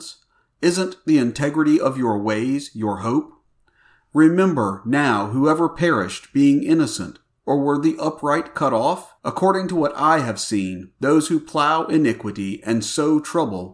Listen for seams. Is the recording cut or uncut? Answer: cut